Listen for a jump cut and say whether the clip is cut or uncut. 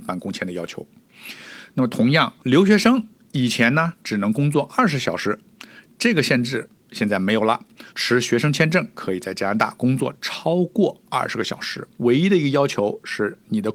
cut